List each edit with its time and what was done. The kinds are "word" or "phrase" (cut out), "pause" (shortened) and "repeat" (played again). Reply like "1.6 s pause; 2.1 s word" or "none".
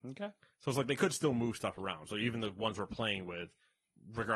none